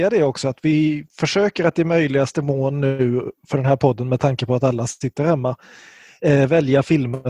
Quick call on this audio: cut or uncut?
uncut